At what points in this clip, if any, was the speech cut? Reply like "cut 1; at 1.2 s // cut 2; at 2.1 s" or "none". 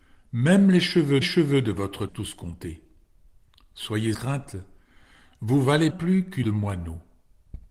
cut 1; at 1.2 s // cut 2; at 2.1 s // cut 3; at 4.1 s // cut 4; at 5.9 s // cut 5; at 6.4 s